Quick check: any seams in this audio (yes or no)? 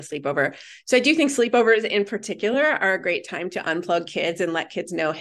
no